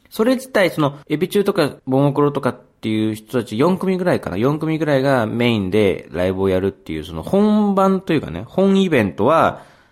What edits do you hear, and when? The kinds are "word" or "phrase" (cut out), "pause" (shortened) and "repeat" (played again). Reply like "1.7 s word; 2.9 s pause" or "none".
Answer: 1.0 s pause; 1.8 s pause